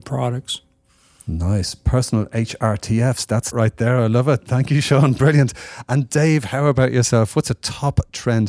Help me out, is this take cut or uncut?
cut